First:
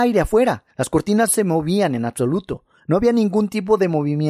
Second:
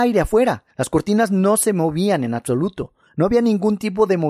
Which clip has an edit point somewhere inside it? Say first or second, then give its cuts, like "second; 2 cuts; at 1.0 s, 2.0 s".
first; 1 cut; at 1.3 s